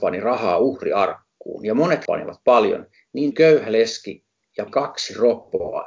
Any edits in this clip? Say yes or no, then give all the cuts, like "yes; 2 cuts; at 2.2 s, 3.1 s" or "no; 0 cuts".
yes; 3 cuts; at 2.1 s, 3.3 s, 4.7 s